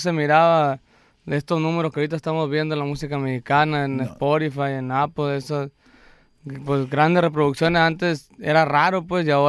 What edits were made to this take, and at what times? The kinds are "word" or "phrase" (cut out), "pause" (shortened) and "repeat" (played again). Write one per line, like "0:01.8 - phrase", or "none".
none